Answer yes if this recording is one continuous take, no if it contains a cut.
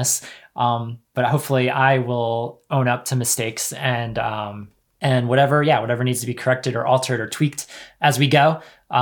yes